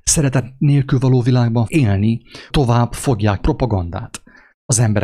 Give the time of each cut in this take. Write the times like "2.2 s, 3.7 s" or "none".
1.7 s, 2.5 s, 3.4 s